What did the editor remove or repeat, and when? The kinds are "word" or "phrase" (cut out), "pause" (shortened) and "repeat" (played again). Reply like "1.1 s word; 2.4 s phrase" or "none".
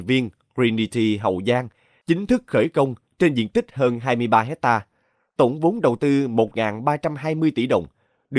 none